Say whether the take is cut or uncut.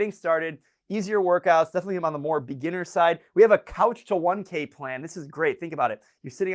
uncut